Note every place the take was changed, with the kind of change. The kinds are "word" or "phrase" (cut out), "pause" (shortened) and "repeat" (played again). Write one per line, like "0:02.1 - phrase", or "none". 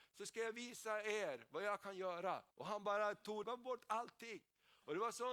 0:02.5 - pause
0:03.4 - phrase